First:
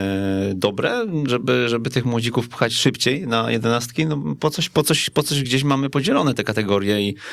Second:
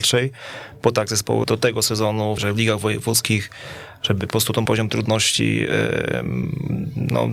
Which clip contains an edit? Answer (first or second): second